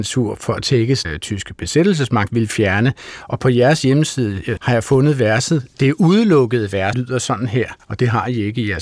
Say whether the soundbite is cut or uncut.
cut